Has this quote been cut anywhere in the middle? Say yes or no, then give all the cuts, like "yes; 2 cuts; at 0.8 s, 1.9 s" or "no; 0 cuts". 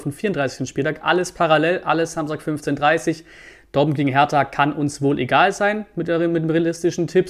no; 0 cuts